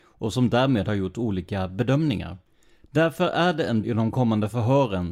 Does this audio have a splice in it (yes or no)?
yes